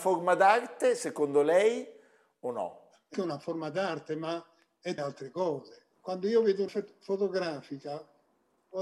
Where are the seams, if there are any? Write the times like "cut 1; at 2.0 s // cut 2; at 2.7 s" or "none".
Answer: cut 1; at 3.1 s // cut 2; at 5.0 s // cut 3; at 6.7 s